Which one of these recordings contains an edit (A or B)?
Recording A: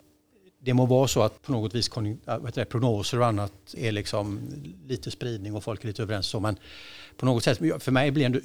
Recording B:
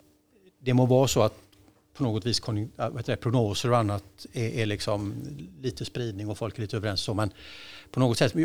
A